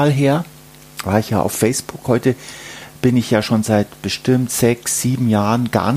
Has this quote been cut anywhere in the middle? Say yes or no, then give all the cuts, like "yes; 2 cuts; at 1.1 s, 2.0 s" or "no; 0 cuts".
no; 0 cuts